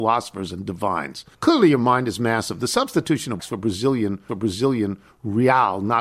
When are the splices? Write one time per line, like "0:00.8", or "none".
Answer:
0:01.3
0:03.4
0:04.3